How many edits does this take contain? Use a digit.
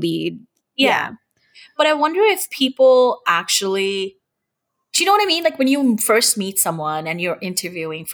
0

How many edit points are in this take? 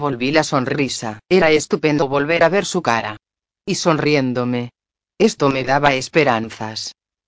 1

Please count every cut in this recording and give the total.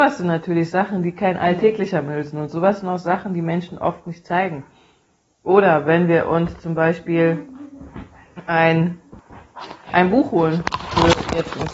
0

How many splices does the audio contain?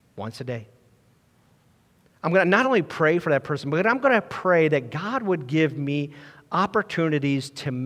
0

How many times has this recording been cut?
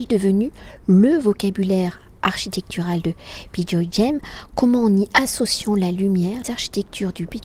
1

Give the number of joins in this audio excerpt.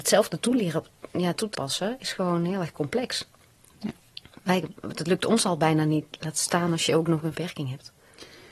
2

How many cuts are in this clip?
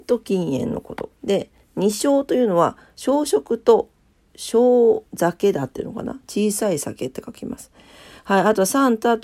2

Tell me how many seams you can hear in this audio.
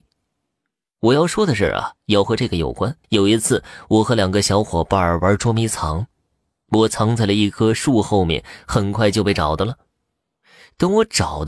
2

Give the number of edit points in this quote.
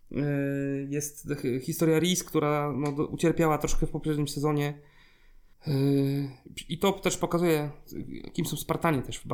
0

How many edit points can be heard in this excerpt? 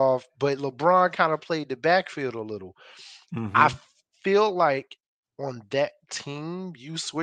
0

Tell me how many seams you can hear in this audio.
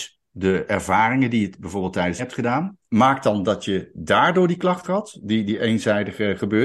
3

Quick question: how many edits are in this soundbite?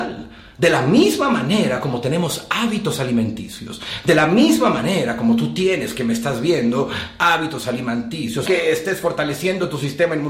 1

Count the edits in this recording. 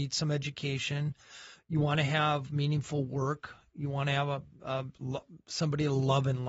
0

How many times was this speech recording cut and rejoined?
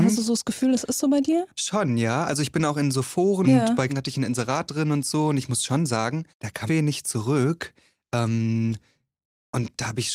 4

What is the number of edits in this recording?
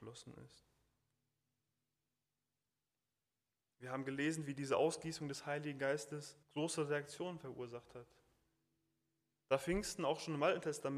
1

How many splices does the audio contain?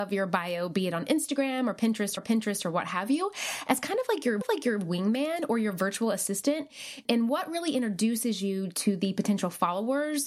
2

